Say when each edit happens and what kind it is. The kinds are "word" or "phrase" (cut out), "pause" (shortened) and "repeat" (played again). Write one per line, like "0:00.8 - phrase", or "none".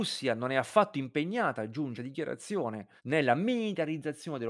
0:02.0 - word
0:03.0 - pause